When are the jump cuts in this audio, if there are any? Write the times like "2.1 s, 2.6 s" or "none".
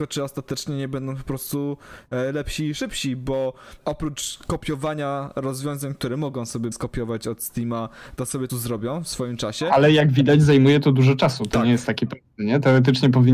3.8 s, 6.7 s, 8.5 s